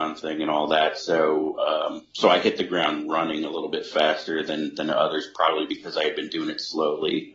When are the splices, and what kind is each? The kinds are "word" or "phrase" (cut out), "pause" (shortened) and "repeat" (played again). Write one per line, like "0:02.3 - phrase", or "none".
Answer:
none